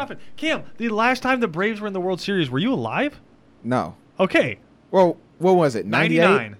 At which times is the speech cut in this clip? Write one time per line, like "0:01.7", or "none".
none